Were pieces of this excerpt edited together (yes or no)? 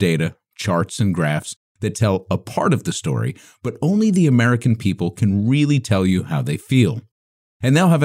no